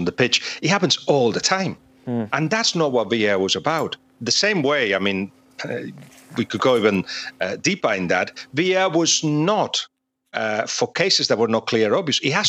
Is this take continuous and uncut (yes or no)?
yes